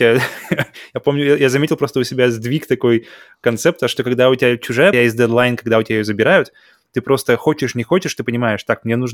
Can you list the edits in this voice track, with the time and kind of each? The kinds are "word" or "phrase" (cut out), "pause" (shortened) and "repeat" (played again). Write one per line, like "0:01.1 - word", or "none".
0:04.9 - phrase